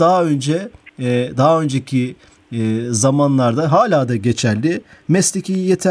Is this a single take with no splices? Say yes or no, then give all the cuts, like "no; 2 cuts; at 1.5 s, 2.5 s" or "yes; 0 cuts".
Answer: yes; 0 cuts